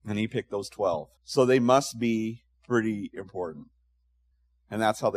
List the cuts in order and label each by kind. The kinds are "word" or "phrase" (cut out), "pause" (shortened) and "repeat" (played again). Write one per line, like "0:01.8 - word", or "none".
0:01.2 - pause
0:02.5 - pause